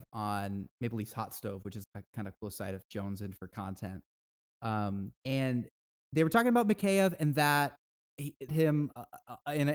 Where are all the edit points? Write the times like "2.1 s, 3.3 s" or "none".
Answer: 1.8 s, 2.8 s, 5.2 s, 8.5 s